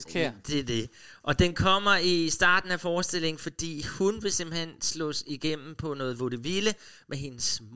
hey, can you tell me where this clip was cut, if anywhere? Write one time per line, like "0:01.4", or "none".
none